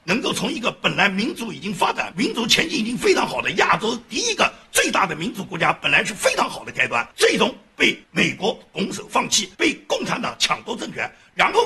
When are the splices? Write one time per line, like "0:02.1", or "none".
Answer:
0:07.1
0:08.0
0:09.5